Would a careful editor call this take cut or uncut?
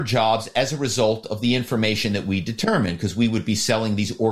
uncut